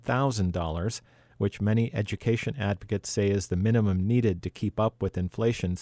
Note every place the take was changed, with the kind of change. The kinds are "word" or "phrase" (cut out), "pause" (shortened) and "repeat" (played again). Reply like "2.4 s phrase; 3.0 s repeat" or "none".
none